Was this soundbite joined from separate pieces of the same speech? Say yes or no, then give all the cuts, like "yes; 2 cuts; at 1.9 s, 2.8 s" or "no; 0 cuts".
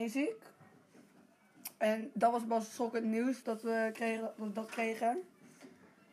yes; 1 cut; at 3.4 s